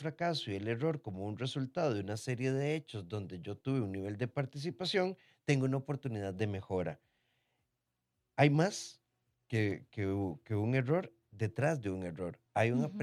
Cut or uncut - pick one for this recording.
uncut